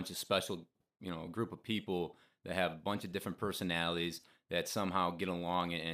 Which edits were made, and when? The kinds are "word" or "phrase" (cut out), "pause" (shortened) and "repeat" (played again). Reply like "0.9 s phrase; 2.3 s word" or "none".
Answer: none